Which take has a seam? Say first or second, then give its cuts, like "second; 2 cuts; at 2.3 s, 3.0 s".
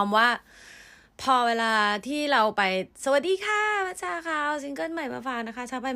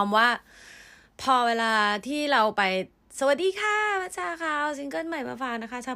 first; 1 cut; at 2.9 s